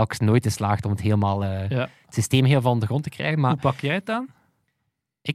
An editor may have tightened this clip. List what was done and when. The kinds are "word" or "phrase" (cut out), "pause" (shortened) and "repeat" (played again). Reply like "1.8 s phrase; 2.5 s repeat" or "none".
none